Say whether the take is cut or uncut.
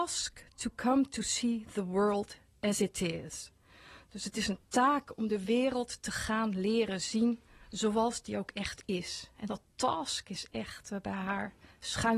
uncut